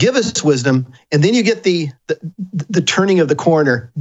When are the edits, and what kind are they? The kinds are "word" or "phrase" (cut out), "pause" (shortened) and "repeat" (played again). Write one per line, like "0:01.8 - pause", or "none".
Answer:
0:00.9 - pause
0:02.0 - pause